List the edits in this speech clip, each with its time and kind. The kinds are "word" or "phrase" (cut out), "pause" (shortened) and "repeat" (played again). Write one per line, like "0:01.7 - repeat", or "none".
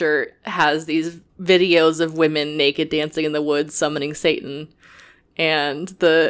0:01.3 - pause